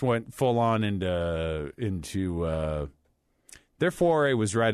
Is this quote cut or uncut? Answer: uncut